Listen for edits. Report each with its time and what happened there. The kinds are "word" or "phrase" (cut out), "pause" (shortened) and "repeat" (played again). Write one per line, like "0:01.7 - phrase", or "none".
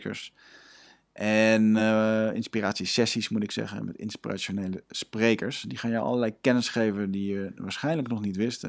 none